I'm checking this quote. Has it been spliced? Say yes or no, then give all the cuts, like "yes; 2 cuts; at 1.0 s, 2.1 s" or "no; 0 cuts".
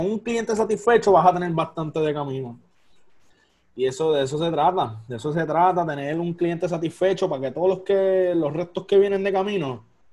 no; 0 cuts